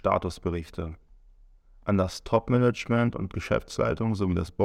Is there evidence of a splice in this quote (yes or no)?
no